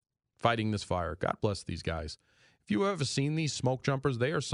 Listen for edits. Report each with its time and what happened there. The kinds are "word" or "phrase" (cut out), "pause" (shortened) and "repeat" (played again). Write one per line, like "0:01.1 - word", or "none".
none